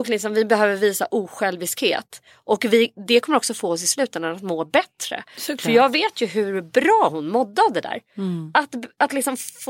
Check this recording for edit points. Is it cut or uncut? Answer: uncut